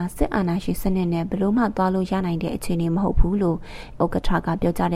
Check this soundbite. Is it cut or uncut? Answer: cut